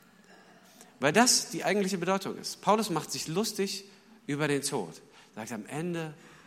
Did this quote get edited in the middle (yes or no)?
no